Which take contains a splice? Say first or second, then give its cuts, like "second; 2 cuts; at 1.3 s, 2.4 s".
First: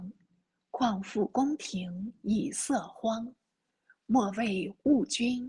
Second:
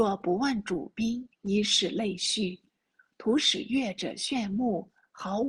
second; 1 cut; at 1.3 s